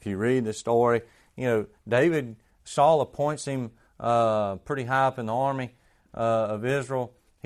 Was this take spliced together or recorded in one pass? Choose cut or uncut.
uncut